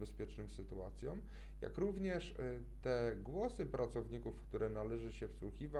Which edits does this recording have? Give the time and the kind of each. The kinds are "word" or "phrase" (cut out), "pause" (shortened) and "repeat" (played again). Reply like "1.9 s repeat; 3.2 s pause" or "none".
none